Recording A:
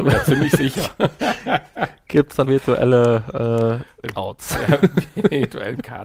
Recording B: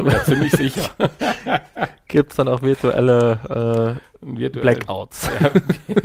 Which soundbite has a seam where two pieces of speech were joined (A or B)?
A